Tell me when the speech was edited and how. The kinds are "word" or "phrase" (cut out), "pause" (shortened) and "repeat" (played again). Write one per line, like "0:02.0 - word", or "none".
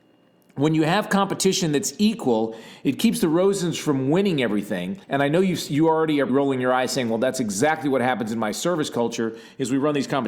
0:05.0 - pause
0:06.3 - word